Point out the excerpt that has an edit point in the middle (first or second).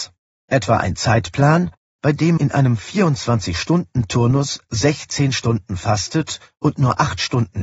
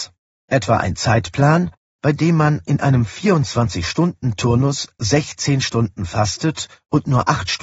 first